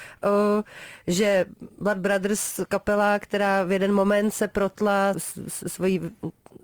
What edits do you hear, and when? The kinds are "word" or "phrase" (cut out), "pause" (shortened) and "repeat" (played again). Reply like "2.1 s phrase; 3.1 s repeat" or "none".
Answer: 5.1 s word